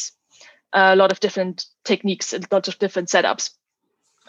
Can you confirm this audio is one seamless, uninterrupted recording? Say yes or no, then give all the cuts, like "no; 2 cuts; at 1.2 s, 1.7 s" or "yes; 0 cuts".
no; 1 cut; at 1.7 s